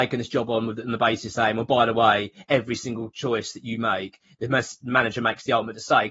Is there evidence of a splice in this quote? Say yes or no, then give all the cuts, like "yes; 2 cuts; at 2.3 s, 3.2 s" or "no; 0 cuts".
no; 0 cuts